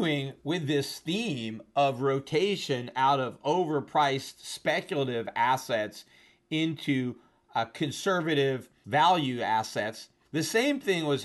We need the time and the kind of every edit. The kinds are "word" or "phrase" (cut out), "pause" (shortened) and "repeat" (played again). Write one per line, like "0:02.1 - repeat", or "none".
none